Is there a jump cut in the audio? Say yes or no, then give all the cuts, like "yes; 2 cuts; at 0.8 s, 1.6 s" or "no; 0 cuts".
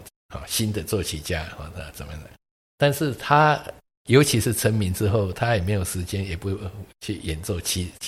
no; 0 cuts